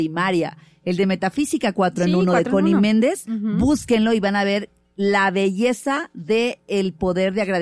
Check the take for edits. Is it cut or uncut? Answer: uncut